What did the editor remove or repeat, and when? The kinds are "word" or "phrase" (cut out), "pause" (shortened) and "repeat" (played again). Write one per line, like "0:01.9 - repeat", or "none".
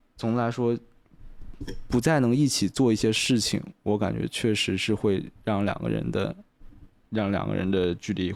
0:07.0 - pause